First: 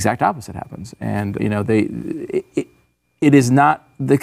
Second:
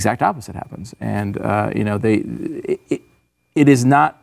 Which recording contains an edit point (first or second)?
first